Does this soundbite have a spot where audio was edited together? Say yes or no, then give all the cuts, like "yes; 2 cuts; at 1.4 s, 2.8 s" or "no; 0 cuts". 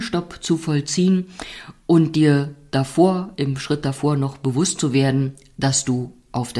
no; 0 cuts